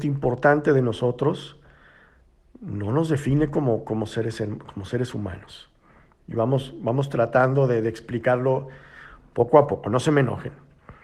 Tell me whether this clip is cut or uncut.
uncut